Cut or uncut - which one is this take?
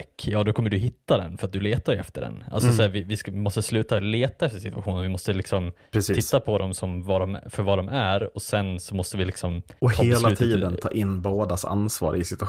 cut